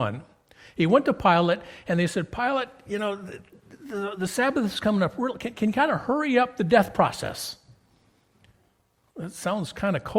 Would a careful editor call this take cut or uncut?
uncut